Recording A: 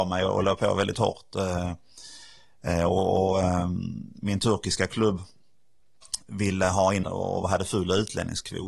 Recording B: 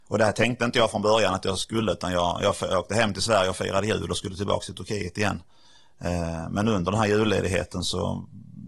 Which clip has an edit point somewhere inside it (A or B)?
A